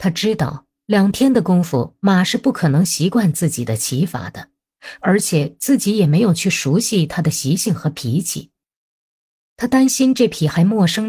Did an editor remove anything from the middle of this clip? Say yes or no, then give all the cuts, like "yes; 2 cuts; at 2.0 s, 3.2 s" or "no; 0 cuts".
no; 0 cuts